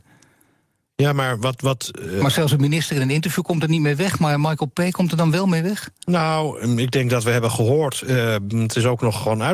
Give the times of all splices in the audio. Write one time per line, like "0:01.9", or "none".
none